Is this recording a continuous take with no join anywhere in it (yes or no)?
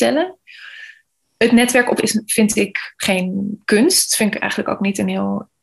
no